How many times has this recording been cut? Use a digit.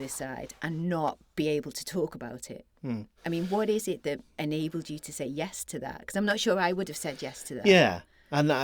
1